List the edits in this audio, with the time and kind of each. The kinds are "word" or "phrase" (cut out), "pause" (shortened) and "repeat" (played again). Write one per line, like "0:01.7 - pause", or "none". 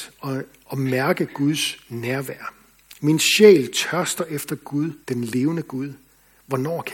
0:05.0 - pause